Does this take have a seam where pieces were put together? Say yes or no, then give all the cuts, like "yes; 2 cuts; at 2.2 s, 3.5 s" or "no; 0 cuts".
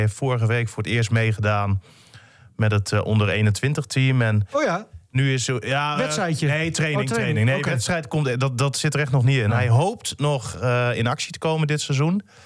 no; 0 cuts